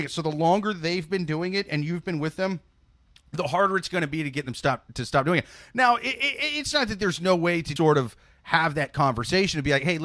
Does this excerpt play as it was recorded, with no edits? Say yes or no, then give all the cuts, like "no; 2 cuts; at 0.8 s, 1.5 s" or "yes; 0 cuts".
no; 1 cut; at 7.8 s